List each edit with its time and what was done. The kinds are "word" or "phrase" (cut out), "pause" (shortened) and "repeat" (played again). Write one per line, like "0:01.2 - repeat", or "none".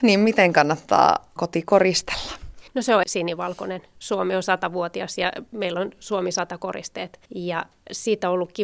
0:01.4 - word
0:02.7 - pause
0:03.0 - word
0:07.3 - pause